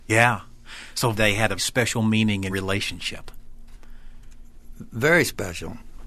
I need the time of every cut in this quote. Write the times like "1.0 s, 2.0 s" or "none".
1.1 s, 1.6 s, 2.5 s